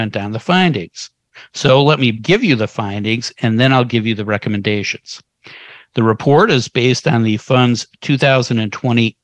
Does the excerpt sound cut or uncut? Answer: uncut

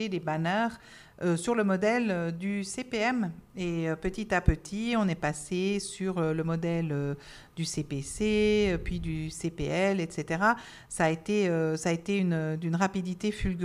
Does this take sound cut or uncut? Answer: uncut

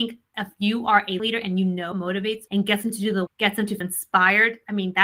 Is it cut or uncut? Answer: cut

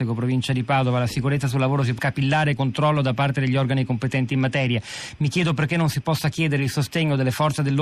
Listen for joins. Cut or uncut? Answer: cut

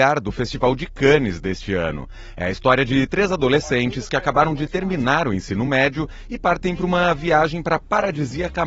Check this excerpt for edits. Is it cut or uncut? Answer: uncut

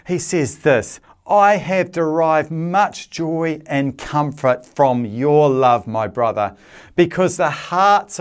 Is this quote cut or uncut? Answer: uncut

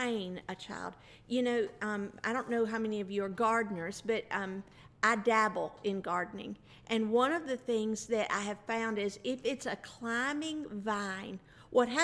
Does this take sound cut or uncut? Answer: uncut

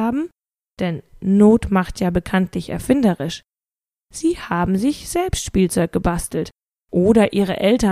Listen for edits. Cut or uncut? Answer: uncut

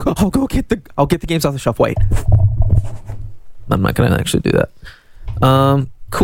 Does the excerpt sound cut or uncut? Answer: uncut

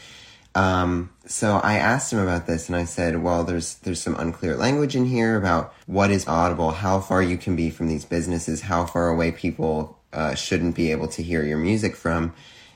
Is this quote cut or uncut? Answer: cut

